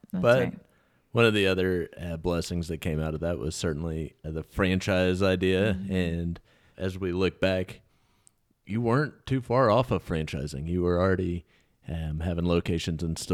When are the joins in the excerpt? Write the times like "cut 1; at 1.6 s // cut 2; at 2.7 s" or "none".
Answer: cut 1; at 4.2 s // cut 2; at 6.7 s